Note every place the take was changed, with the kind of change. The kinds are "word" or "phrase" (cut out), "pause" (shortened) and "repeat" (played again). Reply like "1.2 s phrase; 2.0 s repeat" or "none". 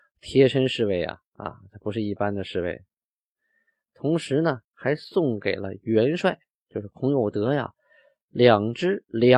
none